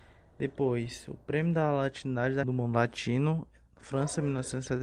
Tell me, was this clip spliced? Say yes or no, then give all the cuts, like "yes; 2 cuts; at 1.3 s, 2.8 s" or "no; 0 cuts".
yes; 1 cut; at 2.4 s